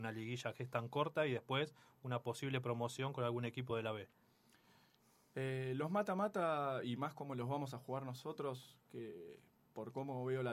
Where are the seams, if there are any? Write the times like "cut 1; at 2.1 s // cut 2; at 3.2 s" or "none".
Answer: none